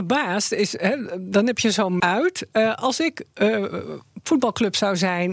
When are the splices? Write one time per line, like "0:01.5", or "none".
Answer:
0:02.0